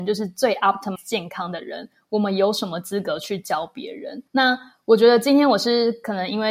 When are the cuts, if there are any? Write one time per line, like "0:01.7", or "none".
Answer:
0:01.0
0:04.3